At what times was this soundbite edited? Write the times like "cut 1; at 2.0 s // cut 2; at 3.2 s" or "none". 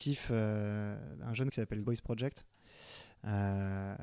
cut 1; at 1.5 s // cut 2; at 1.8 s